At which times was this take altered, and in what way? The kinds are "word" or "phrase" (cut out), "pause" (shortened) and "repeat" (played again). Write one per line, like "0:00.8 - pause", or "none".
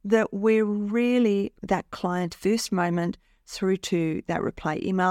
0:01.6 - word
0:02.3 - phrase